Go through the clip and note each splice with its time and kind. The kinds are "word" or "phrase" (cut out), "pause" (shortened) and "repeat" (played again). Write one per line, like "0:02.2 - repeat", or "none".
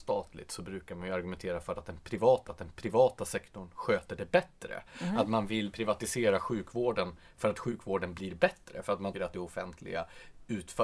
0:02.5 - repeat
0:09.1 - word